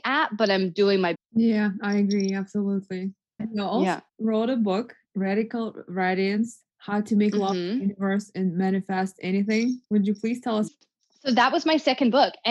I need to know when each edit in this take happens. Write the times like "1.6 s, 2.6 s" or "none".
1.1 s, 3.4 s, 4.1 s, 5.0 s, 6.7 s, 9.8 s, 10.7 s